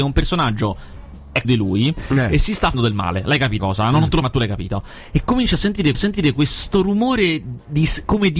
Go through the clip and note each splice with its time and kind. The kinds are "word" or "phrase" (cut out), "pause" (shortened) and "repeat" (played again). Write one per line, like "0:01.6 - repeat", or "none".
0:01.4 - phrase
0:02.7 - word
0:03.6 - word
0:04.2 - phrase
0:05.9 - repeat